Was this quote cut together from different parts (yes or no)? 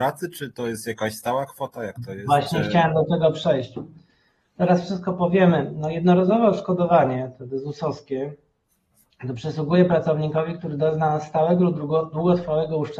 no